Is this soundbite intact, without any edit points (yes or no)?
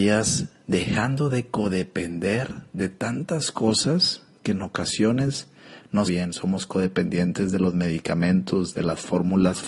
no